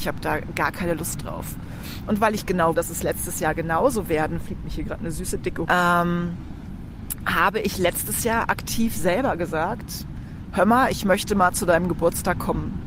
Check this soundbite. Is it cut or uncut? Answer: cut